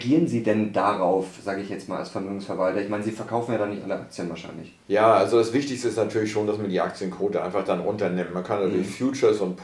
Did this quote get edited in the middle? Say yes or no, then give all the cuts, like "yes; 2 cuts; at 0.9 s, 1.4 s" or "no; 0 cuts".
no; 0 cuts